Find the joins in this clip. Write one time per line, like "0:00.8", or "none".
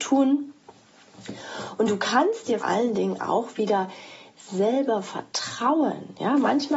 0:02.6

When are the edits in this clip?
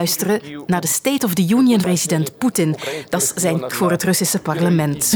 0:01.8
0:03.7

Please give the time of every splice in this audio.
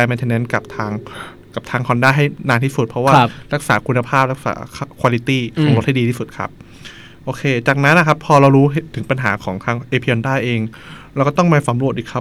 none

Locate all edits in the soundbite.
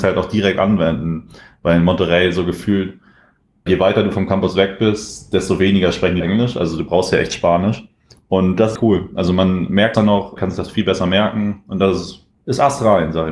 0:03.7
0:06.2
0:08.8
0:09.9
0:10.4
0:12.4

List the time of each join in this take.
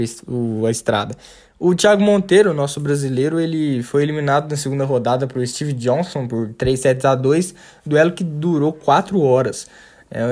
none

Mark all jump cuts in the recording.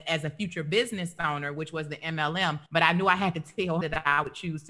0:02.7
0:03.8

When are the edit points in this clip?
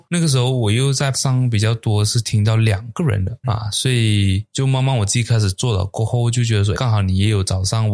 0:01.1
0:03.4
0:06.7

